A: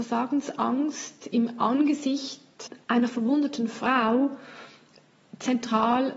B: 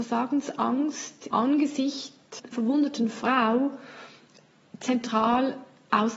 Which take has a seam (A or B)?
B